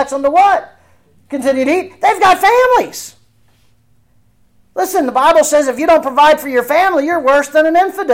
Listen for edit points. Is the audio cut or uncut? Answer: uncut